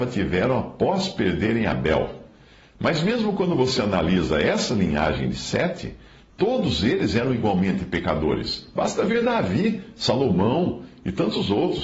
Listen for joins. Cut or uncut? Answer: uncut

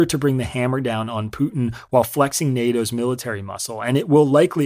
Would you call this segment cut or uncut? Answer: uncut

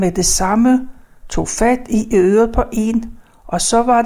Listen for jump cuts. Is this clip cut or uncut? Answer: uncut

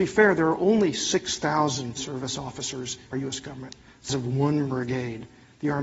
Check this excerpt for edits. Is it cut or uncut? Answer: cut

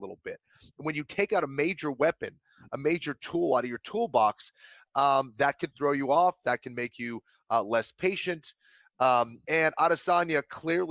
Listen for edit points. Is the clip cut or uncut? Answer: uncut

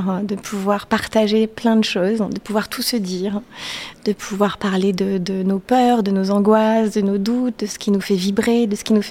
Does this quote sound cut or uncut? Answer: uncut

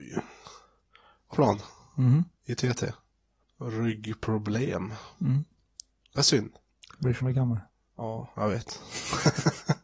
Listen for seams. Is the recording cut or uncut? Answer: cut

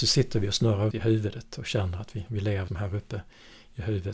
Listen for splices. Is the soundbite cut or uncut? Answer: cut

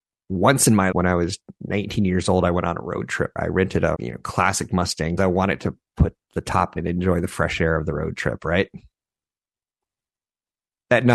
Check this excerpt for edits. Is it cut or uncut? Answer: cut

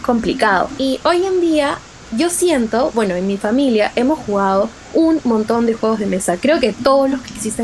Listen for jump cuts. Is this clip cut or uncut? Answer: uncut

